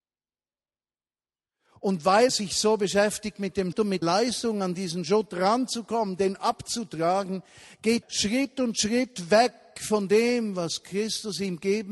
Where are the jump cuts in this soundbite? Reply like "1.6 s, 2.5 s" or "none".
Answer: 2.3 s, 3.7 s, 4.0 s, 8.0 s